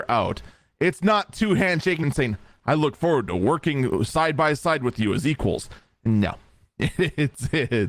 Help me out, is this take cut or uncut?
cut